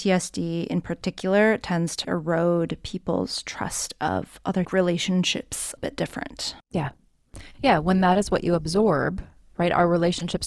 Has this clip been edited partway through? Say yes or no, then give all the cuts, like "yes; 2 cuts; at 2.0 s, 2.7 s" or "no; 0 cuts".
yes; 4 cuts; at 2.0 s, 4.6 s, 5.8 s, 6.6 s